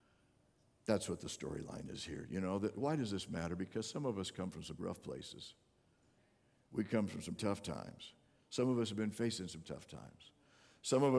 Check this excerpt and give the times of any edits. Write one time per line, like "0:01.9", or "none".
0:04.8
0:07.4
0:09.6